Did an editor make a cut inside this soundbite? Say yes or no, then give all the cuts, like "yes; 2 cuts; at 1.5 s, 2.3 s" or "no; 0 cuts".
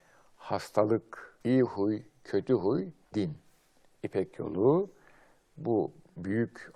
yes; 2 cuts; at 1.4 s, 3.1 s